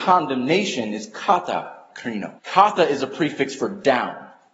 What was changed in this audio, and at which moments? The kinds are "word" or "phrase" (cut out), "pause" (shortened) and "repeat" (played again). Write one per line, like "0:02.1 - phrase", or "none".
0:02.4 - pause